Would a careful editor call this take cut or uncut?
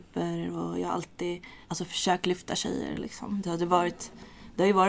cut